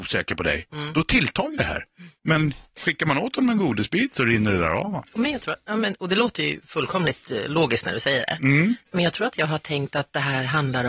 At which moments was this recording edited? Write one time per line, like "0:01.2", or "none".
0:02.2
0:08.8